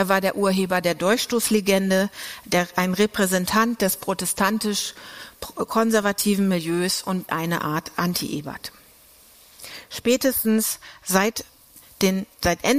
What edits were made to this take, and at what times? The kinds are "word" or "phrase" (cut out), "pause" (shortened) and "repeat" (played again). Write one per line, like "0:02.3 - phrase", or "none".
0:07.3 - word